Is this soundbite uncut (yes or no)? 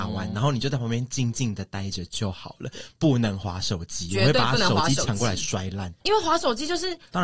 no